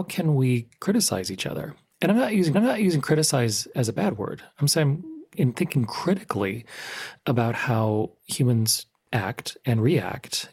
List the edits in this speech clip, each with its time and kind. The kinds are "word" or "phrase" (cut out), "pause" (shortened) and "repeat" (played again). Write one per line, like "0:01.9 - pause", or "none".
0:02.5 - repeat